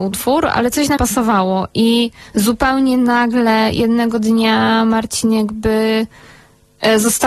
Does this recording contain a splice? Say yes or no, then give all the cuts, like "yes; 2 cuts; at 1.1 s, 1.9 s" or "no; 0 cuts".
yes; 1 cut; at 1.0 s